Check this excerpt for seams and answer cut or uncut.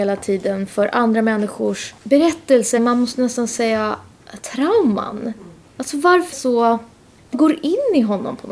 cut